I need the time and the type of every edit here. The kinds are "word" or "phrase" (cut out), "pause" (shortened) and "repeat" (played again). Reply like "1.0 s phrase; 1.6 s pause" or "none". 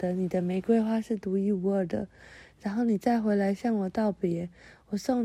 none